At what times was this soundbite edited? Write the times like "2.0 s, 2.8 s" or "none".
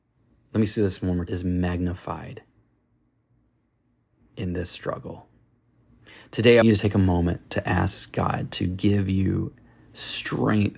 1.3 s, 6.6 s